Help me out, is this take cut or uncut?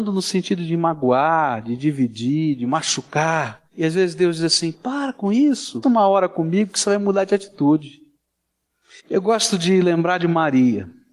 cut